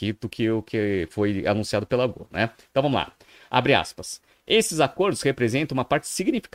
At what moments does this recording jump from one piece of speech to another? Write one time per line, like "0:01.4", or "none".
none